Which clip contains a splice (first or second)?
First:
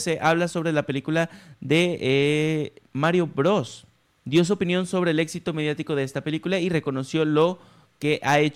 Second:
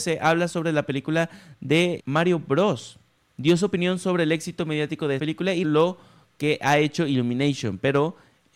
second